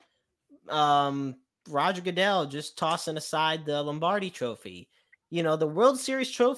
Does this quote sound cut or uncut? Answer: uncut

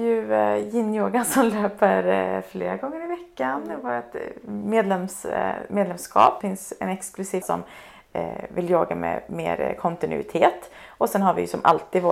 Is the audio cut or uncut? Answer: cut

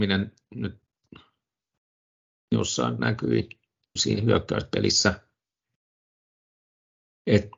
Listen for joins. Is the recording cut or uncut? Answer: cut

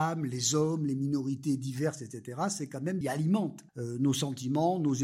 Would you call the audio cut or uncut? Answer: cut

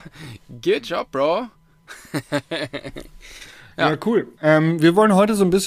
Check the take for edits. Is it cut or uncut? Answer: cut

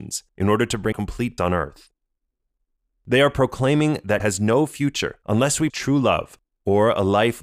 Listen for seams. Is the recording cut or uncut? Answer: cut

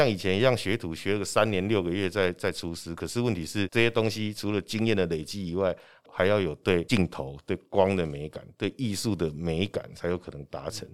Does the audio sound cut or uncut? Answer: uncut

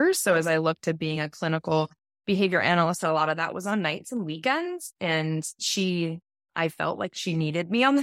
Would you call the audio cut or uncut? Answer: uncut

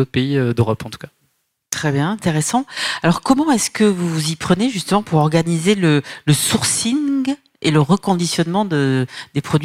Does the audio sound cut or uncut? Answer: uncut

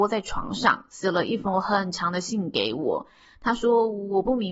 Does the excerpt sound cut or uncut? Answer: uncut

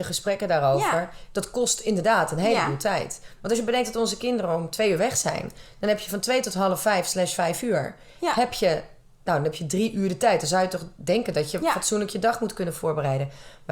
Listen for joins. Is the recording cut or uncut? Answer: uncut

